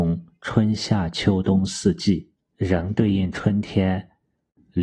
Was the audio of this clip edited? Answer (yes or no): yes